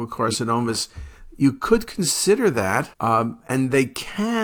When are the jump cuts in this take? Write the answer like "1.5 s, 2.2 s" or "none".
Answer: 2.9 s